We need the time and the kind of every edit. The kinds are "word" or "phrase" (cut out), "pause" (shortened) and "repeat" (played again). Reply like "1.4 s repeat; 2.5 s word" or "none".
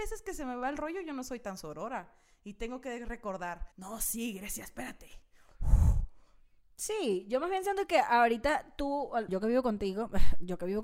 3.7 s pause; 9.3 s word